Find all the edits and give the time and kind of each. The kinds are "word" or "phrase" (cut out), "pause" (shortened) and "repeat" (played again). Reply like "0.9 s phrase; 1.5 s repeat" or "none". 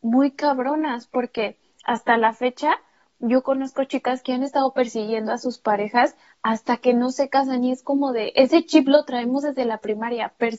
none